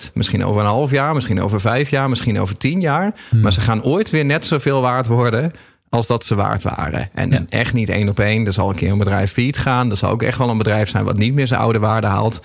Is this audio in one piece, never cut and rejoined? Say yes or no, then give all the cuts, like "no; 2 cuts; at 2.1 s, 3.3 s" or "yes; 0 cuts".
yes; 0 cuts